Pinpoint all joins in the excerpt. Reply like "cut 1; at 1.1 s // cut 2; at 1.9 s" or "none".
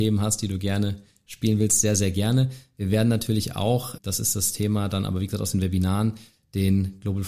cut 1; at 4.0 s